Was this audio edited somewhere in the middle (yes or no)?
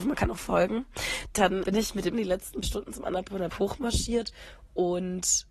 yes